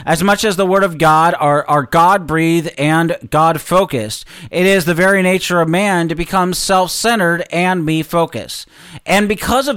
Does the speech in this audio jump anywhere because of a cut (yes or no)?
no